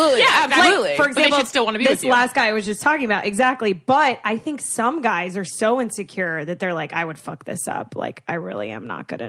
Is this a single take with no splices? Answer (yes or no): yes